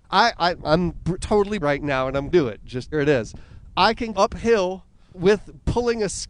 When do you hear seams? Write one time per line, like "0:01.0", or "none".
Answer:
0:01.2
0:01.6
0:02.3
0:02.9
0:04.1
0:05.1